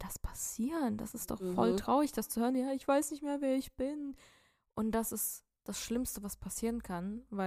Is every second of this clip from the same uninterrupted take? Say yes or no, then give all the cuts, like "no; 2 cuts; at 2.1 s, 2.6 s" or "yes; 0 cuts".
yes; 0 cuts